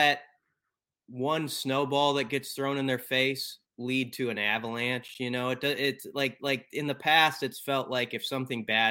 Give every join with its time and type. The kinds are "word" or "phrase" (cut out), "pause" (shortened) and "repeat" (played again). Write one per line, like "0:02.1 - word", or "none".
0:03.6 - pause
0:06.4 - repeat